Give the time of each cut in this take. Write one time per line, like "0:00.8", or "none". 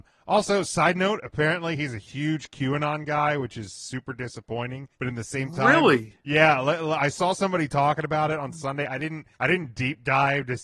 0:04.9
0:09.3